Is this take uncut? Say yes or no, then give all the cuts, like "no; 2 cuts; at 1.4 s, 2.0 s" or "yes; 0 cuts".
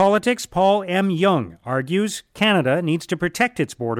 yes; 0 cuts